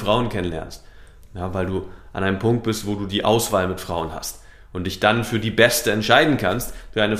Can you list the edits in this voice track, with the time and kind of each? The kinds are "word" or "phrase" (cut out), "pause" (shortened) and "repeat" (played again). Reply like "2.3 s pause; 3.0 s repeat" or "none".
none